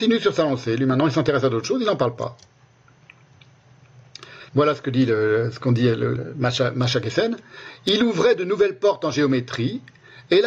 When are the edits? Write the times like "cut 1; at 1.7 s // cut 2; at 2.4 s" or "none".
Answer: cut 1; at 4.5 s // cut 2; at 6.2 s